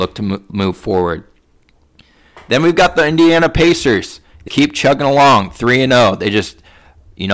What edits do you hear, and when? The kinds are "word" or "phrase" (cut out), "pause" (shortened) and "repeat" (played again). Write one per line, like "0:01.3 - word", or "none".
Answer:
0:04.5 - word

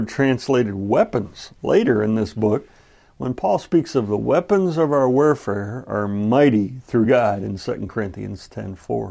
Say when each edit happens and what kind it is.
none

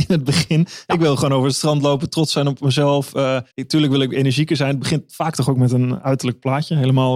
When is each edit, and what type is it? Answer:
0:03.5 - pause

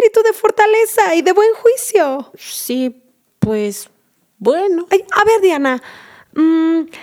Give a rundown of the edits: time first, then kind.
none

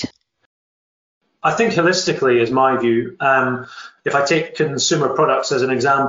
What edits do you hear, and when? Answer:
none

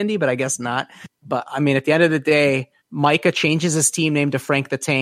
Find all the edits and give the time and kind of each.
0:01.1 - pause
0:02.8 - pause

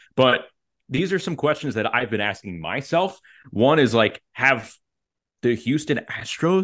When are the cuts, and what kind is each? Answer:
none

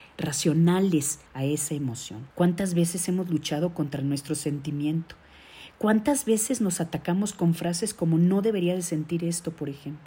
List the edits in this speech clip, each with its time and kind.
0:01.3 - pause
0:02.3 - pause

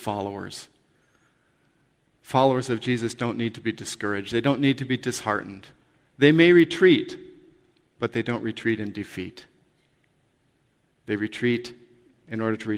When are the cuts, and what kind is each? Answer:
none

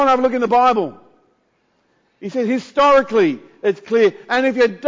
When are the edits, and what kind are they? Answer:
none

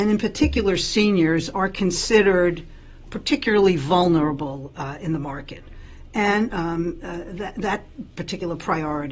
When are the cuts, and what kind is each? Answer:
0:03.1 - word
0:06.5 - phrase

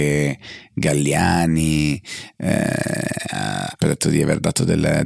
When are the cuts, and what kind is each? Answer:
0:03.8 - word

